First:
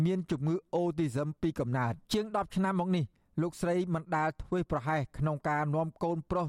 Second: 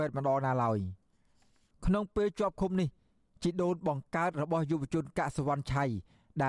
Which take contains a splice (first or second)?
first